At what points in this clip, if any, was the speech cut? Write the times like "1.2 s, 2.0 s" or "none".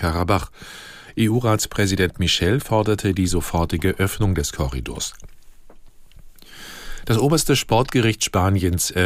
none